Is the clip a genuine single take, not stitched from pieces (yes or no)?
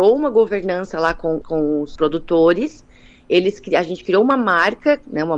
no